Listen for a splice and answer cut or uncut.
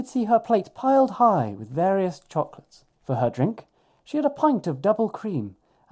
cut